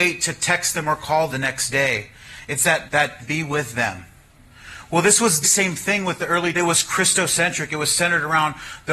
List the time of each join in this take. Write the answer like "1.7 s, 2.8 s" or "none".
1.3 s, 2.9 s, 3.2 s, 5.4 s, 6.5 s

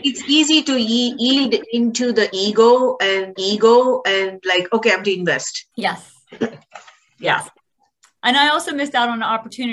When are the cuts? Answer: 3.4 s, 5.0 s, 5.7 s

